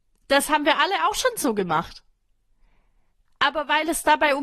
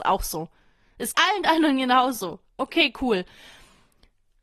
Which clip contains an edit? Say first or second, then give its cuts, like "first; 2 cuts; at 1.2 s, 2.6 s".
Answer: second; 1 cut; at 1.1 s